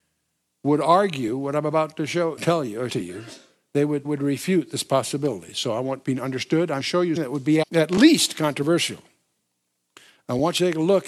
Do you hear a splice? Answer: yes; 7 cuts; at 2.4 s, 2.9 s, 4.0 s, 6.0 s, 6.8 s, 7.2 s, 7.6 s

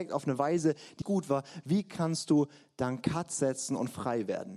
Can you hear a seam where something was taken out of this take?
yes; 1 cut; at 1.0 s

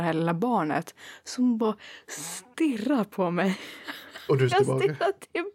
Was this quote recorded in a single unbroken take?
no; 1 cut; at 4.5 s

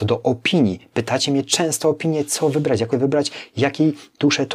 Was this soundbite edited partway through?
yes; 1 cut; at 2.9 s

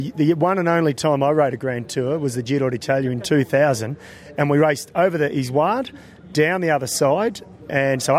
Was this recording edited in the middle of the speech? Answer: no; 0 cuts

